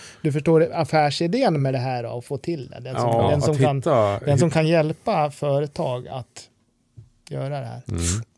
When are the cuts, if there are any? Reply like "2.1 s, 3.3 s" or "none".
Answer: none

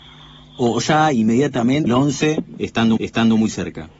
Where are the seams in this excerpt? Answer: 1.9 s, 3.0 s

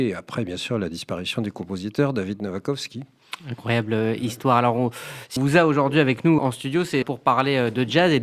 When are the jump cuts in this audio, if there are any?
5.4 s, 6.4 s, 7.0 s

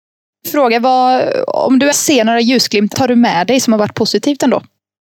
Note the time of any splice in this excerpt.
1.9 s, 2.9 s

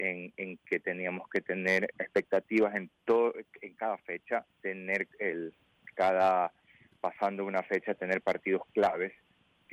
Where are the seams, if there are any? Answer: 1.9 s, 4.5 s

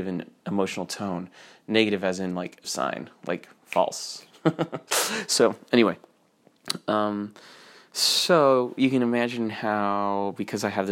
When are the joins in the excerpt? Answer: 2.6 s

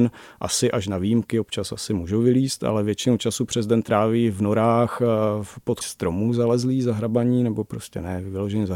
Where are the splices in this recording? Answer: 5.8 s

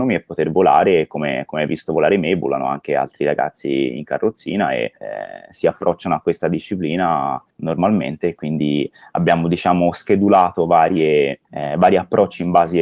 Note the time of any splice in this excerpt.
5.0 s, 7.5 s, 11.4 s

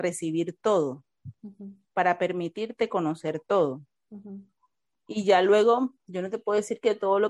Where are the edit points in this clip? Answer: none

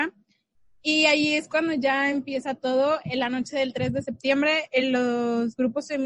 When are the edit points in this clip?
none

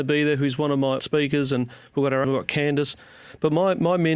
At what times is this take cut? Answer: 1.0 s, 2.2 s

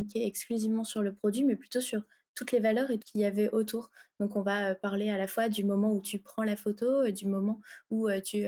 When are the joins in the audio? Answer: 3.0 s

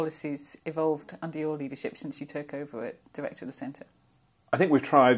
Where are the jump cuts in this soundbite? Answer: none

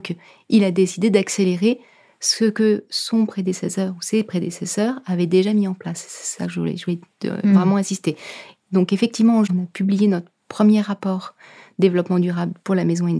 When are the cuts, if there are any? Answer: 9.5 s

